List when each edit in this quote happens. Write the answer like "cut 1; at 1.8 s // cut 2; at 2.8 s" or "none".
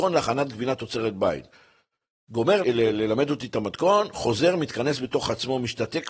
none